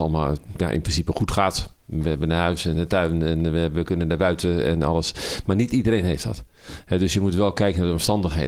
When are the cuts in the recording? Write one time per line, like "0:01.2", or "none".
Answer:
none